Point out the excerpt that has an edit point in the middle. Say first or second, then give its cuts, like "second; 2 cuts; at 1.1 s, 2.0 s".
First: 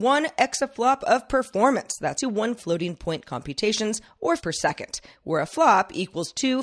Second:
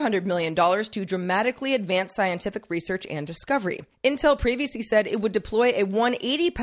first; 3 cuts; at 2.2 s, 2.6 s, 4.4 s